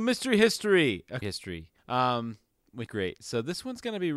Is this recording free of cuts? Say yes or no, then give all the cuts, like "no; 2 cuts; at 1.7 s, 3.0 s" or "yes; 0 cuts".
no; 3 cuts; at 1.2 s, 1.8 s, 2.9 s